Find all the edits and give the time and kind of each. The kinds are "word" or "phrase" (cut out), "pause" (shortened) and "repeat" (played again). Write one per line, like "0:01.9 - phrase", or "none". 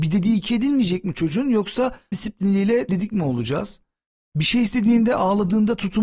0:02.1 - word
0:02.9 - word